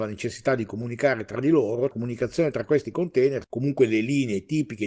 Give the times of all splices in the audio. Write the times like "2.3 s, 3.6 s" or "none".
1.9 s, 3.4 s